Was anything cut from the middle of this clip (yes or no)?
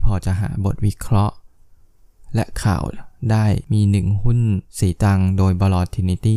yes